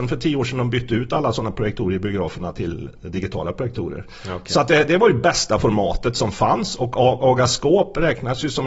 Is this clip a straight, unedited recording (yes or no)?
yes